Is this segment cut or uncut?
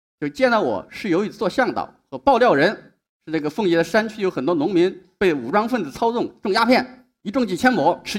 uncut